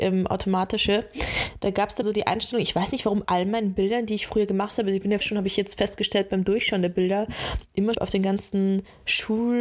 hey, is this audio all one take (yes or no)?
no